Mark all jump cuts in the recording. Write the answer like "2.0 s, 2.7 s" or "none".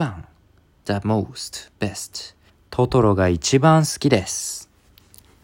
2.5 s